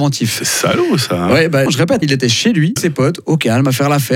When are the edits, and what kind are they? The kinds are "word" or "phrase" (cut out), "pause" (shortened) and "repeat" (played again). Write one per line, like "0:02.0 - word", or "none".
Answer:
0:01.7 - word
0:02.0 - word
0:02.8 - word